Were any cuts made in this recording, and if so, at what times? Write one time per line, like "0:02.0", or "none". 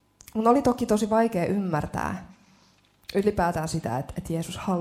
none

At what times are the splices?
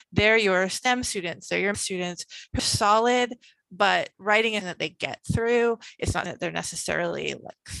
0:01.7
0:02.6
0:04.1
0:04.6
0:06.3

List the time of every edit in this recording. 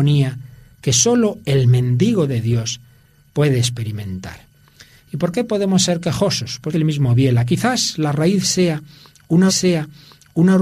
0:06.7
0:09.5

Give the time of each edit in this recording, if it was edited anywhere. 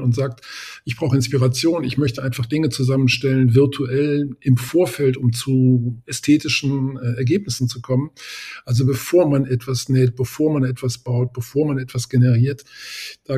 none

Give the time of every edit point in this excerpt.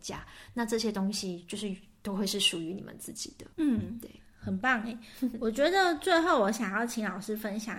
0:03.5

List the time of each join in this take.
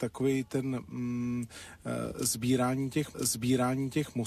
0:03.1

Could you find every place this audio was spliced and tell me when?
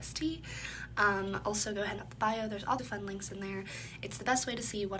0:02.0
0:02.8

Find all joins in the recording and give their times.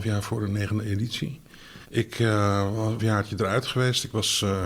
0:01.8
0:03.0

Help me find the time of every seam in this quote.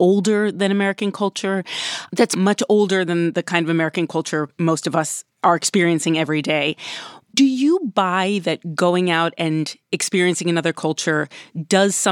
0:05.3

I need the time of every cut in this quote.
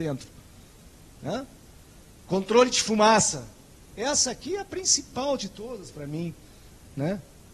none

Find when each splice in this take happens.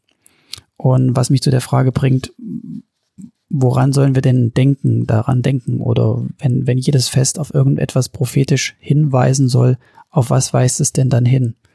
none

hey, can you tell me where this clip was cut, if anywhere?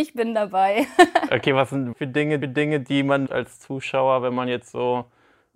0:01.9
0:02.4
0:03.3

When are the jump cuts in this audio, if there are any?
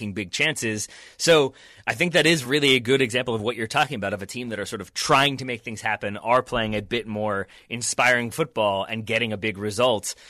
none

